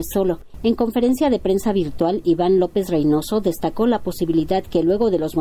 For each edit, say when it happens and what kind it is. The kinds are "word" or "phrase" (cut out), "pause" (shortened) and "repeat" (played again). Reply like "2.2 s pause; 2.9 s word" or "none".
none